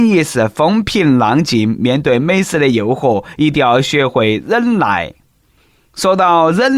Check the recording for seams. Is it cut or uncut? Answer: uncut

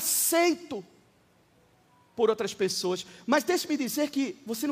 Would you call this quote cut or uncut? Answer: uncut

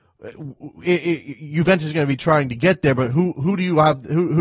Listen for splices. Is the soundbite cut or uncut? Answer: uncut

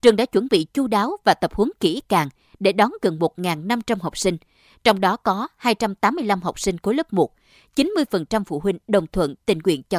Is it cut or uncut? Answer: uncut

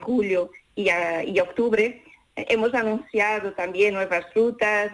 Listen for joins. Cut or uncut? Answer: uncut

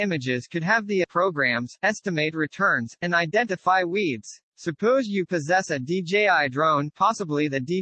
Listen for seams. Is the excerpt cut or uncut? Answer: cut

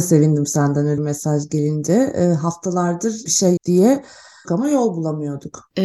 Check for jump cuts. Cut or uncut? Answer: cut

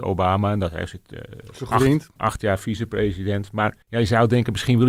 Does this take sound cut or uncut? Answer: cut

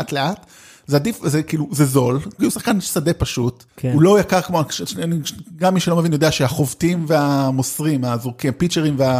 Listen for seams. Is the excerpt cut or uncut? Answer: cut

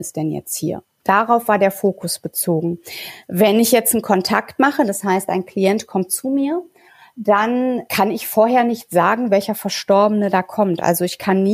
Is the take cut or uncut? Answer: uncut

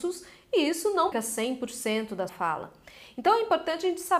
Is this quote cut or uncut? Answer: cut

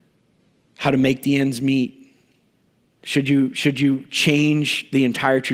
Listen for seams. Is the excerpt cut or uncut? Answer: uncut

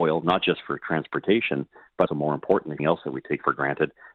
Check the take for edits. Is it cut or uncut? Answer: cut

